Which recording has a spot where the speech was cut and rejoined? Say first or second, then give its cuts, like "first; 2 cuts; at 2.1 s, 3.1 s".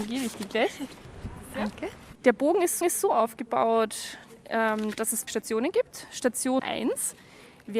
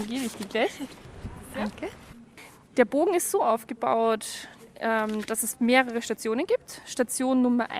first; 4 cuts; at 2.2 s, 2.8 s, 5.3 s, 6.6 s